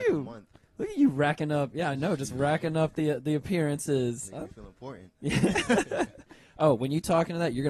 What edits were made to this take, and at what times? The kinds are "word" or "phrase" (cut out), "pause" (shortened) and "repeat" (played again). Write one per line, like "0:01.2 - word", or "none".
none